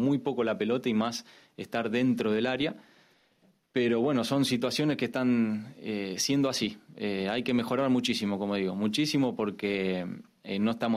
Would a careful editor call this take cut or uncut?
uncut